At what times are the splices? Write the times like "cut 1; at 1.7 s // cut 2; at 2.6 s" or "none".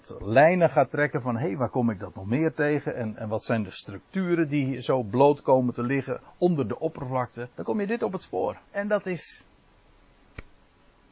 cut 1; at 7.5 s // cut 2; at 8.7 s

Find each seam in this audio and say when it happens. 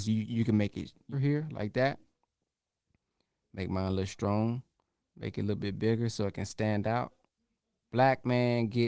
cut 1; at 1.1 s // cut 2; at 5.0 s

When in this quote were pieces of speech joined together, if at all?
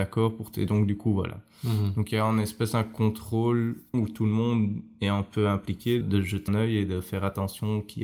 cut 1; at 3.9 s // cut 2; at 6.0 s // cut 3; at 6.5 s

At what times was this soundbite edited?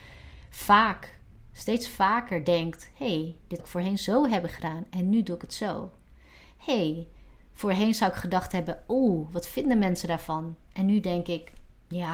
cut 1; at 3.6 s

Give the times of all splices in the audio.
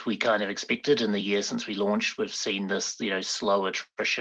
none

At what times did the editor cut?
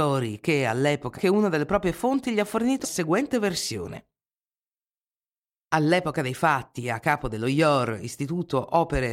cut 1; at 1.2 s // cut 2; at 2.8 s

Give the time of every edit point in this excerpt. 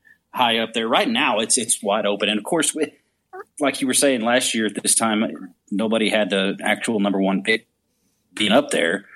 none

